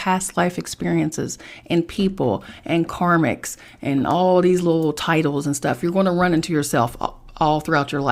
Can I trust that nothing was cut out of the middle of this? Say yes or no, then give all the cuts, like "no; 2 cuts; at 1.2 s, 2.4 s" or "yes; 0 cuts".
yes; 0 cuts